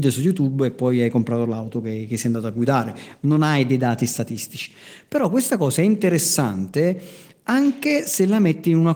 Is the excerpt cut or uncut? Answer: uncut